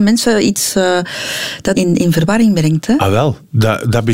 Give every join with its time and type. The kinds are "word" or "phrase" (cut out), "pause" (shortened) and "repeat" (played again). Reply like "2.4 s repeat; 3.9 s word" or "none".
1.7 s word